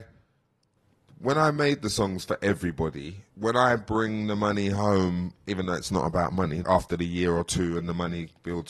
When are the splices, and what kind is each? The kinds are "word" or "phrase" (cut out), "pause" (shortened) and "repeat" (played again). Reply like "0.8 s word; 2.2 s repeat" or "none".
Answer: 3.3 s pause; 6.6 s word